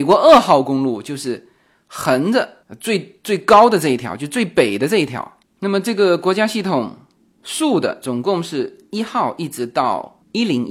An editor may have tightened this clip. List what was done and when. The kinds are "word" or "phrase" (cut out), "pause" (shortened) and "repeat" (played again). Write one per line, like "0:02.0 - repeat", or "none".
none